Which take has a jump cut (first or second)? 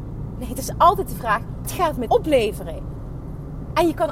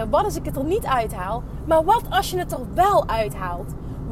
first